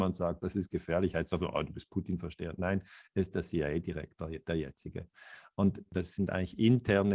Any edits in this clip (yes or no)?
no